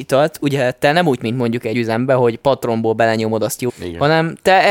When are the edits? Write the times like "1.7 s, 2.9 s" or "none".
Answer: 1.2 s, 1.7 s, 3.7 s